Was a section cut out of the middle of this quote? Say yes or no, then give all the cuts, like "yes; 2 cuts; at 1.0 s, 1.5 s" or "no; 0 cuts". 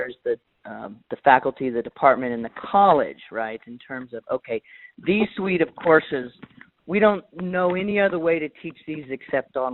no; 0 cuts